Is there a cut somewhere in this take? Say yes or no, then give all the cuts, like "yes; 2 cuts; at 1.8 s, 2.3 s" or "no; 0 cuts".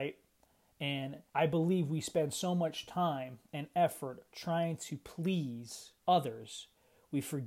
yes; 2 cuts; at 1.3 s, 6.0 s